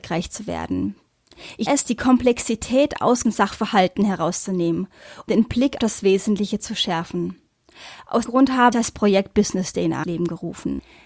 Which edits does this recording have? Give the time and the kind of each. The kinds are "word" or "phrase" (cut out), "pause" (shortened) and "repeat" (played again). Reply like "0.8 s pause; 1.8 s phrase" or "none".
1.7 s word; 3.2 s word; 5.3 s word; 5.8 s word; 8.2 s word; 8.7 s word; 10.0 s word